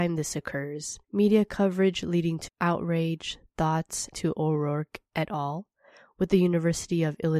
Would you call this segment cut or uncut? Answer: cut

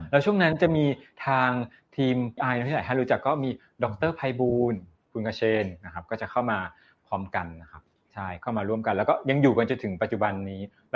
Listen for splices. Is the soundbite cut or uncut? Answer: cut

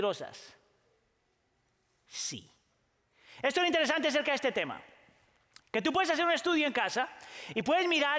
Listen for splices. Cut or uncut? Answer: uncut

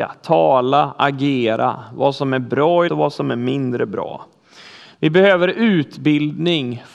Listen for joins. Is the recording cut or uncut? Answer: cut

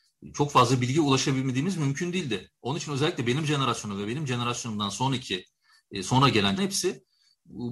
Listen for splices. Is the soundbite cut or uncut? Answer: cut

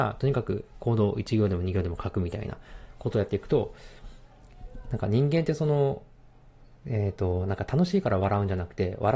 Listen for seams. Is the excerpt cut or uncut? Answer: uncut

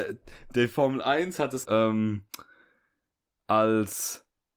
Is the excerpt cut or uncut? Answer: cut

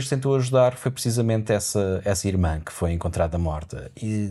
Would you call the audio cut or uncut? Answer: uncut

